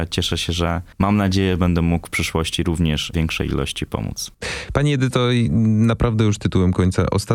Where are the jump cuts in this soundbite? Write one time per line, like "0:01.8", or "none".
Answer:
0:00.9
0:03.1